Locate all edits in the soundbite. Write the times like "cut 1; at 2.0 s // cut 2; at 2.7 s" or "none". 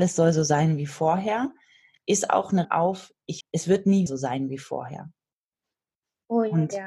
cut 1; at 2.6 s // cut 2; at 3.4 s // cut 3; at 4.1 s